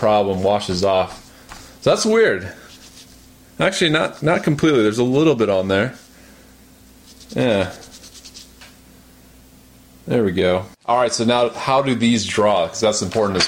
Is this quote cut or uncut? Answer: uncut